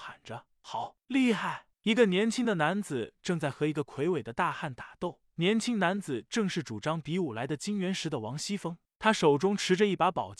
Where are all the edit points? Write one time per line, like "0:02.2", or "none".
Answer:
0:01.0